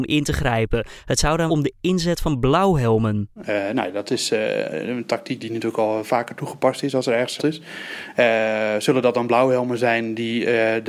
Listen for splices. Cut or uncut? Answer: cut